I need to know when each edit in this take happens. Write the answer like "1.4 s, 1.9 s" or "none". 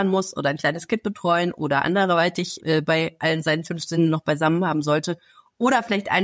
2.6 s